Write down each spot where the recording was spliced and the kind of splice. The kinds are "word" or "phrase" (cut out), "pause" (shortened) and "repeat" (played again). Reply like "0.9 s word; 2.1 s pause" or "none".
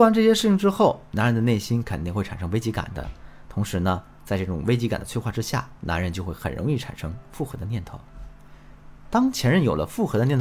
5.8 s pause